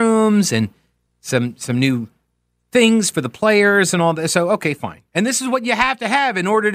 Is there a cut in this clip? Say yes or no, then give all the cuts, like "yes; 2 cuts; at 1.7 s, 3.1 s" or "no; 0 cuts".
no; 0 cuts